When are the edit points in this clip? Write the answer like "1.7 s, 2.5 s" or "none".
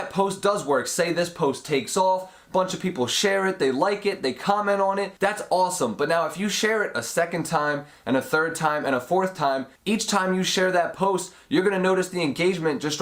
5.2 s, 9.8 s